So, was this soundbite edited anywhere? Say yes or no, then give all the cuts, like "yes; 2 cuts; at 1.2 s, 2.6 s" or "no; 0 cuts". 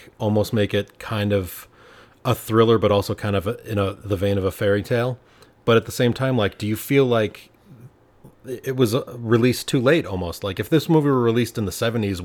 no; 0 cuts